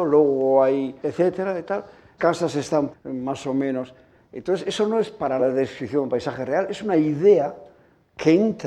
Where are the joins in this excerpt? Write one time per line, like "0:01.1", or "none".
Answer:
0:01.0
0:02.2
0:02.9
0:05.4